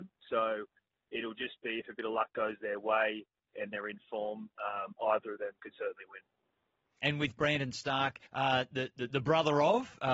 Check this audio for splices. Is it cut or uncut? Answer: cut